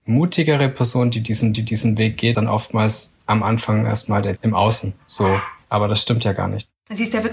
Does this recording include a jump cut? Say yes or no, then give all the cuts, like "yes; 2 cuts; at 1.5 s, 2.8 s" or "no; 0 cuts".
yes; 5 cuts; at 1.5 s, 2.3 s, 3.2 s, 4.4 s, 5.6 s